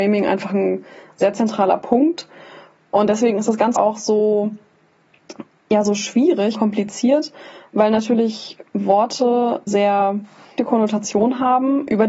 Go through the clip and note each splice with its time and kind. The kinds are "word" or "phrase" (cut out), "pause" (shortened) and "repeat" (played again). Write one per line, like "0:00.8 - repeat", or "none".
0:03.8 - word
0:06.5 - word
0:09.7 - word
0:10.6 - word